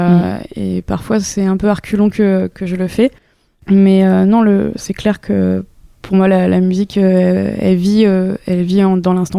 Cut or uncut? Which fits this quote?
uncut